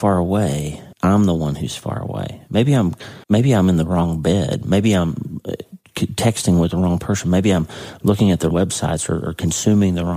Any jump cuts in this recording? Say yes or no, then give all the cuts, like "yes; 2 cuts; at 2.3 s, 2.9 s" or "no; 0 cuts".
yes; 3 cuts; at 0.9 s, 3.2 s, 8.5 s